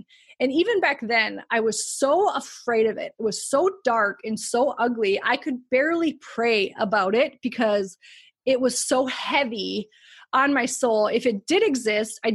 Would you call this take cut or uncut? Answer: uncut